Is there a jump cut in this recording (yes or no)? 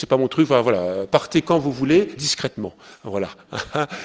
yes